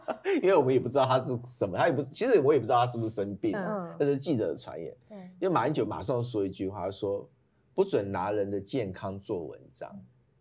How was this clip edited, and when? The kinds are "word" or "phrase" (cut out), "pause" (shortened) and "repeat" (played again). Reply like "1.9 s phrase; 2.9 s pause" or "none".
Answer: none

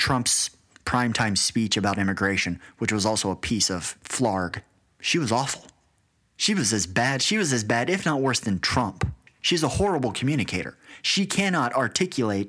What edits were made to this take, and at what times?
none

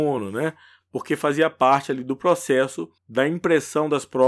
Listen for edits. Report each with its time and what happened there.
3.0 s pause

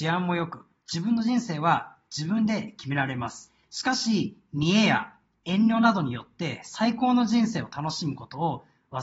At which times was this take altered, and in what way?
none

